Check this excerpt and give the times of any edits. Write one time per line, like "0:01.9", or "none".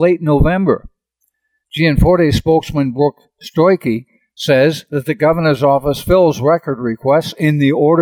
none